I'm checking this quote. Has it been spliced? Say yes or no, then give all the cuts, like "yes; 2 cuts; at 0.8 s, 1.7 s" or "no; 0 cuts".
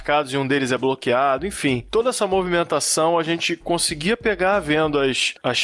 no; 0 cuts